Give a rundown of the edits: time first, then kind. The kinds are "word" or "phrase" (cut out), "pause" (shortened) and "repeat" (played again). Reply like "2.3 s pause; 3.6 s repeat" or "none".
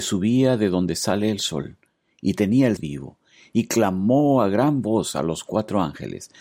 2.8 s phrase

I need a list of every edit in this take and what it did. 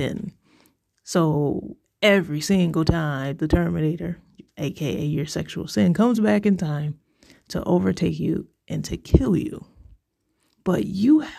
none

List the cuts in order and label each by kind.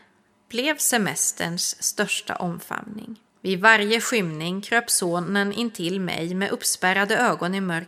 3.3 s pause

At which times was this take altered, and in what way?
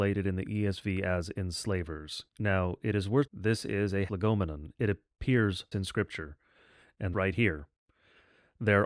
2.3 s pause; 3.3 s phrase; 4.1 s word; 5.7 s word; 7.1 s word

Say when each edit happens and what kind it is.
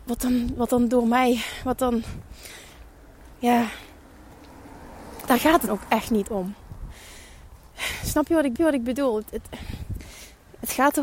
5.7 s word; 8.6 s repeat

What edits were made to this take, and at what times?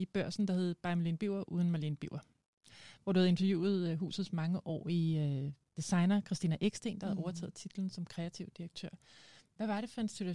none

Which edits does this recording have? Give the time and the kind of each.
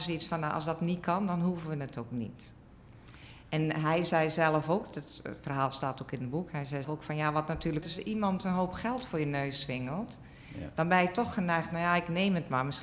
6.8 s word; 7.8 s word

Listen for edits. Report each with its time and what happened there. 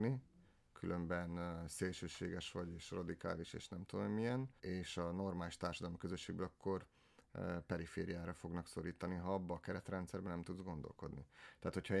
4.6 s pause

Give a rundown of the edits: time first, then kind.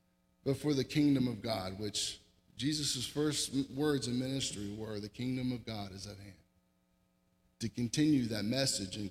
none

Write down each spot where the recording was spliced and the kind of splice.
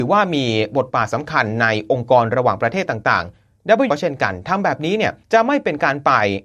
3.9 s word; 5.2 s pause

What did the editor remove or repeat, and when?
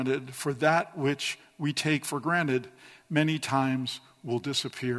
none

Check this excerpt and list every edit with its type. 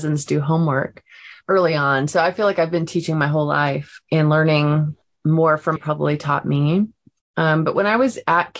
1.4 s word; 4.0 s word; 5.8 s phrase

